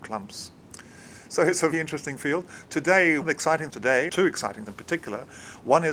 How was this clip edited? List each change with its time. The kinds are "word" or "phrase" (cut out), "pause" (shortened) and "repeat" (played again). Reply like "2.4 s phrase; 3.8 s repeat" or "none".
1.7 s word; 3.2 s word; 3.7 s word; 4.1 s word; 4.7 s word